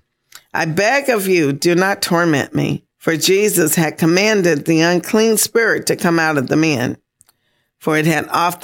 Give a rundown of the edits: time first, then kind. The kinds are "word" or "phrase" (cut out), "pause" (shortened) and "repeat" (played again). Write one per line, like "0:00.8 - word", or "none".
0:02.9 - pause